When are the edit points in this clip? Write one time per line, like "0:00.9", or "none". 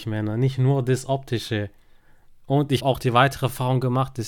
0:02.8